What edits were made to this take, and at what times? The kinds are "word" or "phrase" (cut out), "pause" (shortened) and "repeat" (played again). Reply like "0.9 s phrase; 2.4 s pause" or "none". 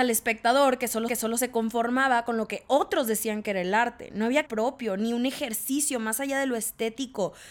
1.1 s repeat; 4.5 s word